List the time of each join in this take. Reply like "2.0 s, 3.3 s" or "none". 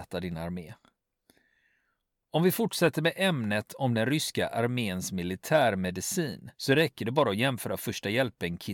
6.5 s